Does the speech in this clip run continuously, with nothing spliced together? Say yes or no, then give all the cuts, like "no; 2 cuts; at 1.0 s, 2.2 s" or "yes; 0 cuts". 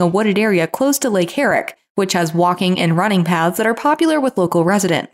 yes; 0 cuts